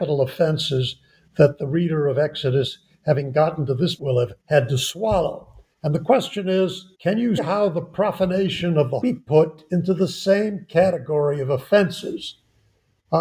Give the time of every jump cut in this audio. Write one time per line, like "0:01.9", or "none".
0:04.0
0:04.4
0:05.7
0:06.9
0:07.4
0:09.0